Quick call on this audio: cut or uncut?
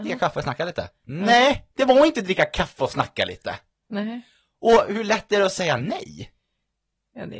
uncut